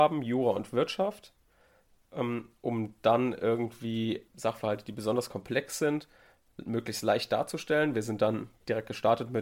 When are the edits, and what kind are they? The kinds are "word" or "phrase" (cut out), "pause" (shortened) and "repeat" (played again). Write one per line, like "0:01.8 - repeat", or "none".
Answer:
0:04.3 - word